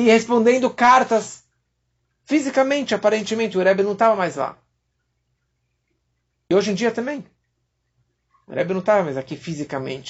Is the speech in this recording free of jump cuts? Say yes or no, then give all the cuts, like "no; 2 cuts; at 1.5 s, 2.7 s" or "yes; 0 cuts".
yes; 0 cuts